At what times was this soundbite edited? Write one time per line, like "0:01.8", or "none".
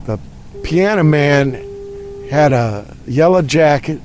none